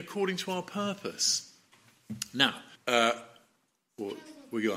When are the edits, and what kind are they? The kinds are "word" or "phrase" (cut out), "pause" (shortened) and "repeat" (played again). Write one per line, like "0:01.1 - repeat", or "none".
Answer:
0:02.8 - pause